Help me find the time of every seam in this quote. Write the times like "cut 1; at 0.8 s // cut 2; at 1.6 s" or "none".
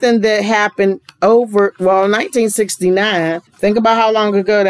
cut 1; at 3.5 s